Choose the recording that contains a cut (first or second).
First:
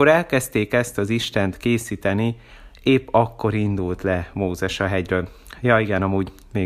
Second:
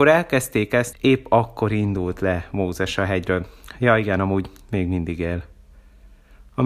second